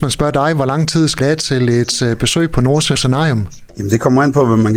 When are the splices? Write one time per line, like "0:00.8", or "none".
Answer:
0:01.2
0:02.9
0:03.7